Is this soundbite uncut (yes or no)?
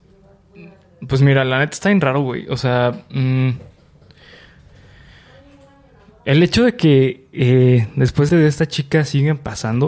no